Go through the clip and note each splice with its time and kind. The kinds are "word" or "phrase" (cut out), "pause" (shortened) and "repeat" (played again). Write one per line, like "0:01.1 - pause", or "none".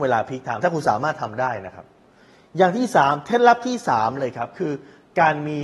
none